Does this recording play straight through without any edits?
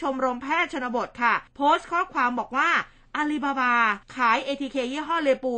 no; 2 cuts; at 1.5 s, 4.0 s

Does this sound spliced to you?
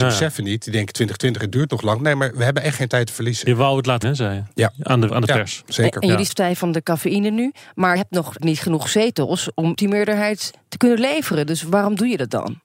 yes; 6 cuts; at 4.0 s, 5.1 s, 6.3 s, 8.0 s, 8.4 s, 9.8 s

